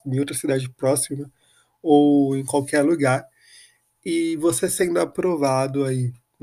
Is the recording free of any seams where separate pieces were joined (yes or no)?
yes